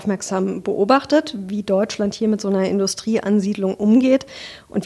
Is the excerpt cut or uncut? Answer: uncut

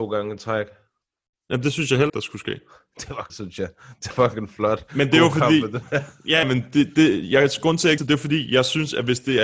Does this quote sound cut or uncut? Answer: cut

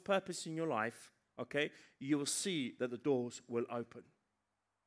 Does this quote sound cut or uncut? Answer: uncut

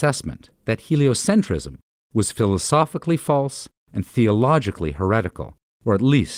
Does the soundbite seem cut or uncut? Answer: uncut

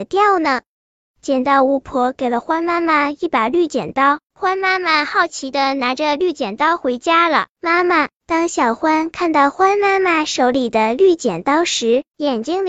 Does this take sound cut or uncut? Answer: cut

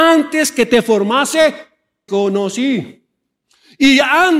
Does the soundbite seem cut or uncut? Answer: cut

